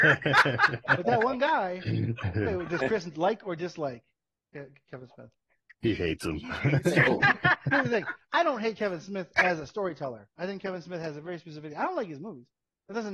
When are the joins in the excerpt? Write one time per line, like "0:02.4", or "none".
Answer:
none